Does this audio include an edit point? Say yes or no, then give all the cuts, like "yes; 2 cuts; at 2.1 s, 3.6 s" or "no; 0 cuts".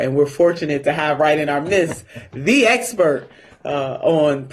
no; 0 cuts